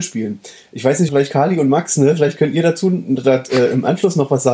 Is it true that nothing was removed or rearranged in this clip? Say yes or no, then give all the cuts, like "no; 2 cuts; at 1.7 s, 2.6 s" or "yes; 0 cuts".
no; 1 cut; at 1.1 s